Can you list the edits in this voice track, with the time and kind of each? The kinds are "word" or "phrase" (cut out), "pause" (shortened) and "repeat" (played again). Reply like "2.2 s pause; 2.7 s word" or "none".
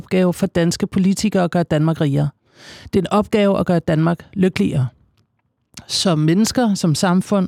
none